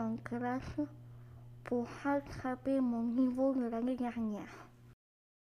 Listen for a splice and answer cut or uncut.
uncut